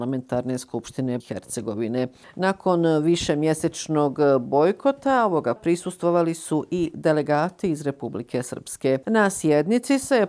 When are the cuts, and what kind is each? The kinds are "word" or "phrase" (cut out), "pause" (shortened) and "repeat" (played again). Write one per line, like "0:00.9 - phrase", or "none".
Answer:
0:01.2 - phrase
0:05.6 - word